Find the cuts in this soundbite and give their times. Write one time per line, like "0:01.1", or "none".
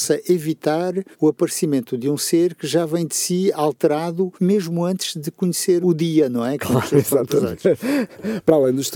0:01.1
0:04.4
0:05.8